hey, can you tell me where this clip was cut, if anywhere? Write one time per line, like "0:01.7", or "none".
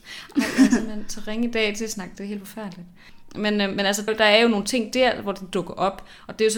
0:02.1
0:04.1